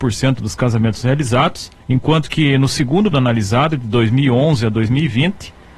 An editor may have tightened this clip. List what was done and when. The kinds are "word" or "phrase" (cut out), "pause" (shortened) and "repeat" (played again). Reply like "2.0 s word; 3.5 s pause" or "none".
1.8 s pause; 3.1 s word